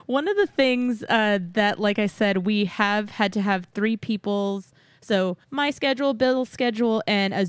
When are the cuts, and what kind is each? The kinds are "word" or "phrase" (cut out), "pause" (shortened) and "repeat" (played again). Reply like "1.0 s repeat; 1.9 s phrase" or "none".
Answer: 5.4 s pause